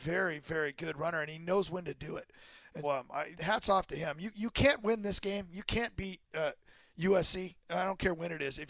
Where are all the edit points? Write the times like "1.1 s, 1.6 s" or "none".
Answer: 2.8 s, 3.3 s, 7.6 s